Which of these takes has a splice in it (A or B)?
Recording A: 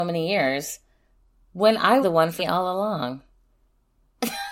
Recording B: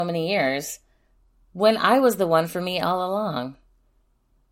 A